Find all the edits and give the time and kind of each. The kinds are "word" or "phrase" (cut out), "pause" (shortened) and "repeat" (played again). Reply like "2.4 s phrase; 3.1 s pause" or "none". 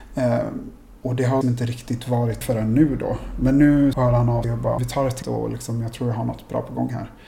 1.4 s word; 2.4 s word; 3.9 s word; 4.4 s word; 4.8 s word; 5.2 s word

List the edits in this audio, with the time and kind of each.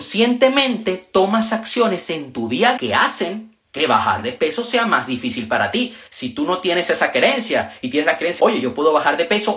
2.8 s word; 6.1 s pause; 8.4 s word

